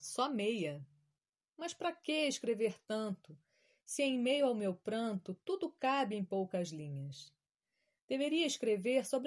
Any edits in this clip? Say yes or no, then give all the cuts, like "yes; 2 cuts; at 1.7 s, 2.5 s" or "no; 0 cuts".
no; 0 cuts